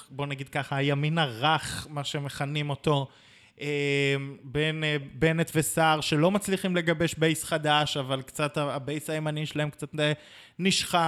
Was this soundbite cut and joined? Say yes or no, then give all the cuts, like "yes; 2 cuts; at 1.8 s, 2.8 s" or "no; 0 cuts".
no; 0 cuts